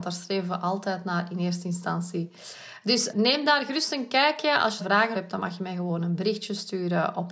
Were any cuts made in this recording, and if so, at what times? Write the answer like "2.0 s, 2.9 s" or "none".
3.1 s, 4.8 s, 5.1 s